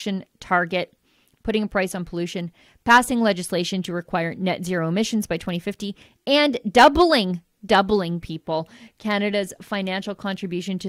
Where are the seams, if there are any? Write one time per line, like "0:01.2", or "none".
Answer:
none